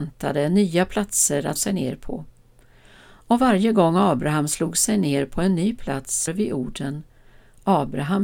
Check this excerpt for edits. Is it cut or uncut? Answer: cut